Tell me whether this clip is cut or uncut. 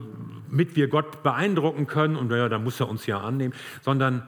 uncut